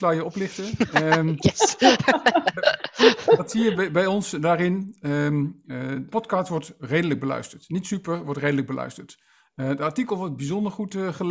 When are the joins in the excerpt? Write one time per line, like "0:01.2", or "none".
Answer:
0:06.1